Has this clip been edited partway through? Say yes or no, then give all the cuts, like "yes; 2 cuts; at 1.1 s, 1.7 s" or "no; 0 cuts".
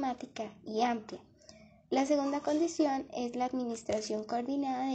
no; 0 cuts